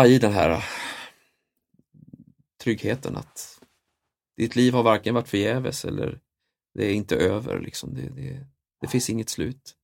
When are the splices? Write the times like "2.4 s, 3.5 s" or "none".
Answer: none